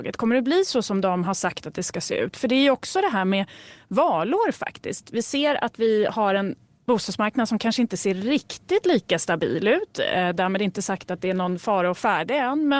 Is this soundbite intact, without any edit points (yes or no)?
yes